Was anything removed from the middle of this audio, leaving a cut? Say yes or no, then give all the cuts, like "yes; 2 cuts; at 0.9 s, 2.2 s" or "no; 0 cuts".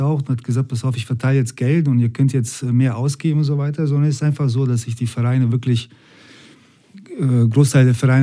no; 0 cuts